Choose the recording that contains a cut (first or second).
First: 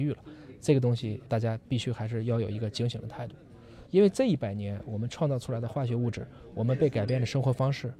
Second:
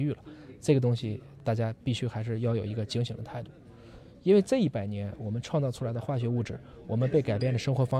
first